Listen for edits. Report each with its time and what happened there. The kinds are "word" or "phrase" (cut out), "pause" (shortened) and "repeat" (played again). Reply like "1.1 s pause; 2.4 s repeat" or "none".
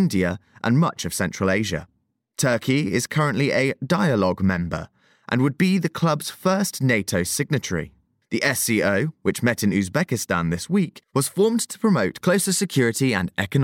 none